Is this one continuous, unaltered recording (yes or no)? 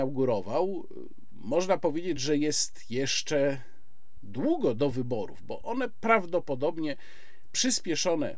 yes